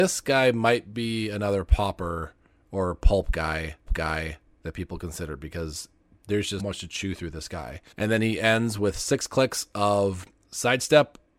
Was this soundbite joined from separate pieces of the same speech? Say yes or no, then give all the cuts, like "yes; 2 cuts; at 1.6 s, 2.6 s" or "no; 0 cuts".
yes; 3 cuts; at 3.9 s, 6.6 s, 7.9 s